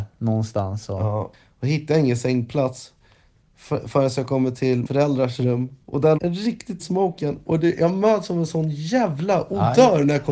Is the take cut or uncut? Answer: cut